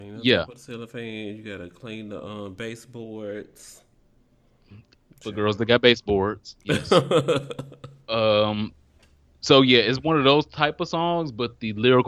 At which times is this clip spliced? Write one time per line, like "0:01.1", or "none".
none